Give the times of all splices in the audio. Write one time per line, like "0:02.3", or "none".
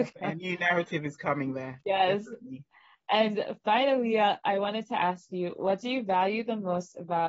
none